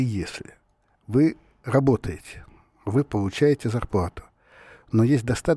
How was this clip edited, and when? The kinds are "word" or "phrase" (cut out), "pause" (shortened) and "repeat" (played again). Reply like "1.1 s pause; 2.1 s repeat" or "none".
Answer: none